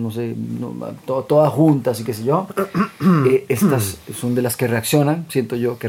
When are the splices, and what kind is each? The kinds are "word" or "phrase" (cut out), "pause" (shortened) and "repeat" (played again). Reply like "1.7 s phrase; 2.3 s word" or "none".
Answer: none